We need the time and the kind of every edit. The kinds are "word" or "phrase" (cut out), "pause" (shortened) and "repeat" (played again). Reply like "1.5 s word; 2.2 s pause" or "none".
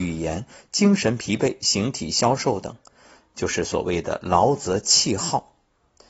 none